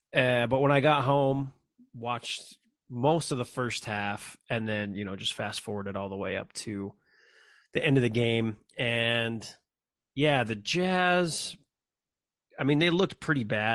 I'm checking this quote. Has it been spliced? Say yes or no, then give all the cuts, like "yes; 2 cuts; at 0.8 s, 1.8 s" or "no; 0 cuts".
no; 0 cuts